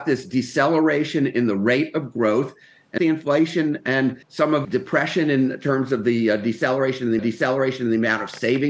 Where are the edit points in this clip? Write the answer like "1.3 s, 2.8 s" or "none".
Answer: 3.0 s, 4.2 s, 4.6 s, 7.2 s